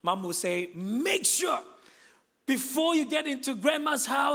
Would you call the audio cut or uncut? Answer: uncut